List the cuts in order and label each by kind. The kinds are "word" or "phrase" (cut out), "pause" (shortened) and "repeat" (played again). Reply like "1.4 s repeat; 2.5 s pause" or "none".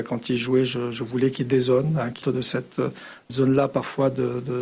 2.2 s word; 3.3 s word